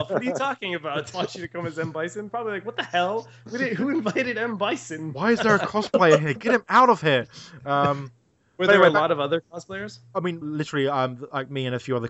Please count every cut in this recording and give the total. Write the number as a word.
three